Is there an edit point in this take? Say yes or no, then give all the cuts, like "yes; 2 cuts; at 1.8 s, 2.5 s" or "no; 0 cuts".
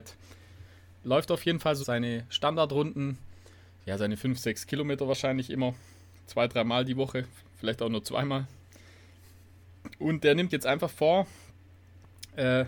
yes; 2 cuts; at 1.8 s, 10.5 s